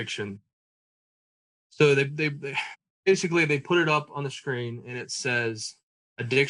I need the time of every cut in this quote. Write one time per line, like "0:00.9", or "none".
none